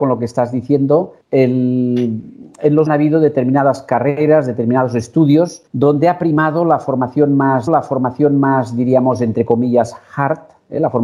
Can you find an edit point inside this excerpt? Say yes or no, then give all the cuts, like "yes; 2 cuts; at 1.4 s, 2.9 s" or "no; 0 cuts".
yes; 4 cuts; at 1.2 s, 2.9 s, 5.7 s, 7.7 s